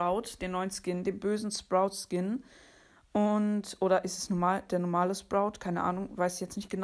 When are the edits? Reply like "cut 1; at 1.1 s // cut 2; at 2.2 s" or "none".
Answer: none

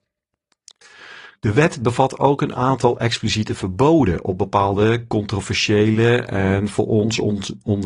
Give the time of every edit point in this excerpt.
cut 1; at 1.4 s

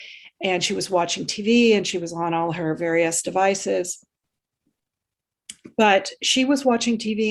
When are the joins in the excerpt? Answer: none

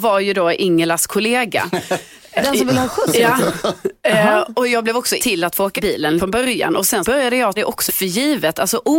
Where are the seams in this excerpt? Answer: cut 1; at 2.4 s // cut 2; at 4.5 s // cut 3; at 5.2 s // cut 4; at 5.8 s // cut 5; at 6.2 s // cut 6; at 7.0 s // cut 7; at 7.6 s // cut 8; at 7.9 s

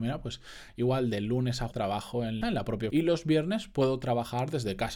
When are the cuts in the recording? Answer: cut 1; at 1.7 s // cut 2; at 2.4 s // cut 3; at 2.9 s

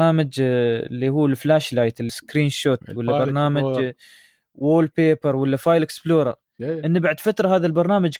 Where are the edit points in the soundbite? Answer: cut 1; at 2.1 s

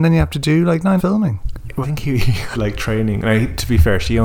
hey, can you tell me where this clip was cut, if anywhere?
cut 1; at 1.0 s // cut 2; at 1.8 s // cut 3; at 2.5 s

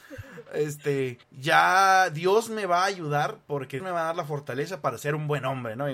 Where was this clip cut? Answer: cut 1; at 1.2 s // cut 2; at 3.8 s

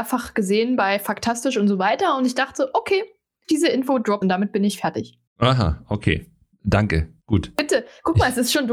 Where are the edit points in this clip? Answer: cut 1; at 3.4 s // cut 2; at 4.2 s // cut 3; at 5.3 s // cut 4; at 7.2 s

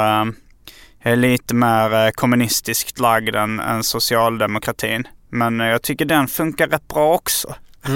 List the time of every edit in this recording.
none

